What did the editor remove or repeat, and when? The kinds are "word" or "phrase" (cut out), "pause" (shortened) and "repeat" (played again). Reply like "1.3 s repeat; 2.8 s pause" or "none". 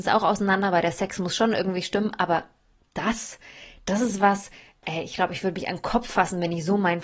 none